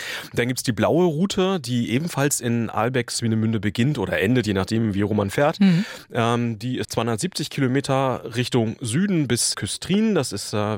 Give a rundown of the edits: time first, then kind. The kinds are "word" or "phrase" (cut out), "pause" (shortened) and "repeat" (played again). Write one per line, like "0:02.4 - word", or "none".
0:06.8 - word
0:09.5 - word